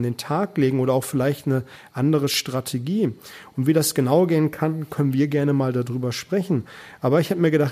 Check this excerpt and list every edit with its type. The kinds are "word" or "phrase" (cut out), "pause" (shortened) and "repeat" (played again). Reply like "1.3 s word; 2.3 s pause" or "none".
none